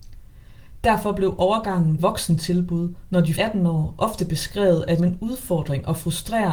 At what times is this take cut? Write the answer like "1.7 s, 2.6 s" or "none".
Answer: 2.0 s, 3.4 s, 5.0 s